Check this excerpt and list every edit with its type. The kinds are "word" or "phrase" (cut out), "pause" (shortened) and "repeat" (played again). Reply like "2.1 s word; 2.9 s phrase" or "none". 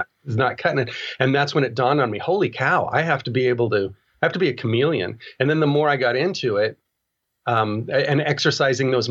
none